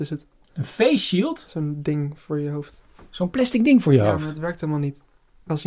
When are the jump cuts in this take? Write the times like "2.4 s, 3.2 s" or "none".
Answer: none